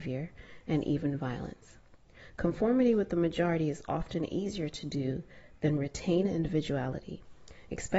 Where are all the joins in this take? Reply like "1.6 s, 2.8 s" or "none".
none